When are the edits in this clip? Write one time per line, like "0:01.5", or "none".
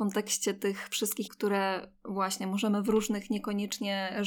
0:01.3